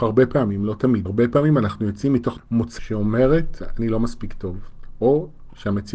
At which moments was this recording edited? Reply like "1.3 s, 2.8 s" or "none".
1.0 s, 2.4 s, 2.8 s